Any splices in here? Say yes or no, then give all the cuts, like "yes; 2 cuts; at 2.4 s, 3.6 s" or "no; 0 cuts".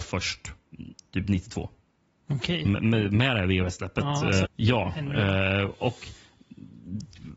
yes; 1 cut; at 4.4 s